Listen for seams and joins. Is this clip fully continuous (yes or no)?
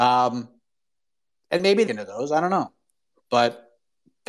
no